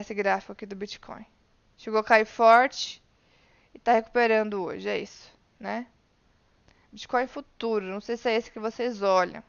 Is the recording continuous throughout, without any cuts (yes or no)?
yes